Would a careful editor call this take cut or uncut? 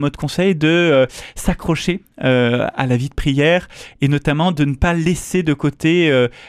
uncut